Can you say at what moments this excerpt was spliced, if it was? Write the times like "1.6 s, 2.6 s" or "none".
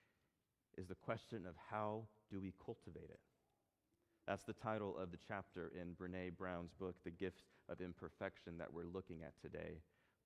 none